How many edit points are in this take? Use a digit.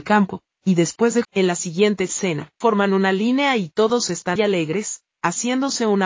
3